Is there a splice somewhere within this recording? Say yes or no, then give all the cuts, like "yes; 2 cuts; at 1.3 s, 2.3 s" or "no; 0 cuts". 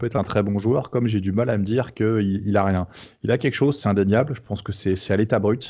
no; 0 cuts